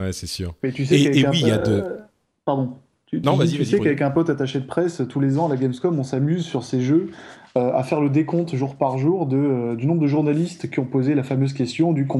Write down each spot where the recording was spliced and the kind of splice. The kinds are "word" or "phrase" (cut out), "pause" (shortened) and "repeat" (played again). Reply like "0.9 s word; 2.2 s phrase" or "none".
none